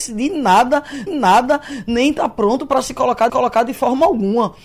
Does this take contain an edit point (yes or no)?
yes